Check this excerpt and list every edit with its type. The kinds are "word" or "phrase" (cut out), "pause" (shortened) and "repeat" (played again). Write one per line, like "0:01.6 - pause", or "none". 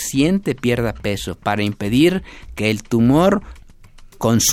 none